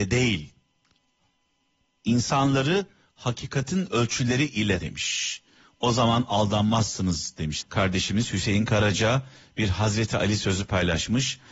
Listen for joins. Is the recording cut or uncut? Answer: cut